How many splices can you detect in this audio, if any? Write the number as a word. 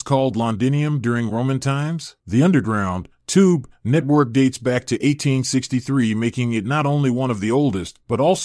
one